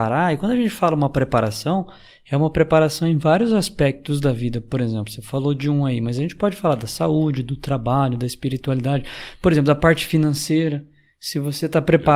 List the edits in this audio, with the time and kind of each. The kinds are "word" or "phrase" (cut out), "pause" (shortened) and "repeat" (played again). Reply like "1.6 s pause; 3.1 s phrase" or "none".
none